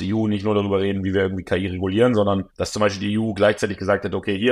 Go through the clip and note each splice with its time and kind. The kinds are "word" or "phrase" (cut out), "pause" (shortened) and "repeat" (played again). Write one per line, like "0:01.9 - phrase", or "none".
0:02.5 - pause